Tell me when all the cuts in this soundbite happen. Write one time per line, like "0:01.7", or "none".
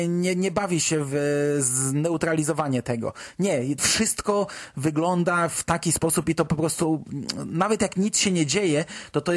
0:03.8